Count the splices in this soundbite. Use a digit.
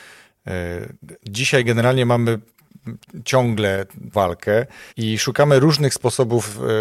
2